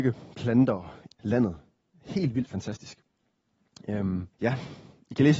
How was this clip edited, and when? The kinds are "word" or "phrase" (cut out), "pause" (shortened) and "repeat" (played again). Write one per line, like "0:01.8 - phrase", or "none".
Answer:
0:01.2 - word
0:04.3 - pause